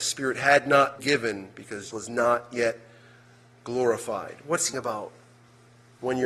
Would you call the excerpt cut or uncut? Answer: cut